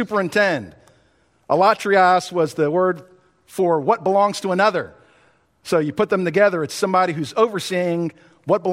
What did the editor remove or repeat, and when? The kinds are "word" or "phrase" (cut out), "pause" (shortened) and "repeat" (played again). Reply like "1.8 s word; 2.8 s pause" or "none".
none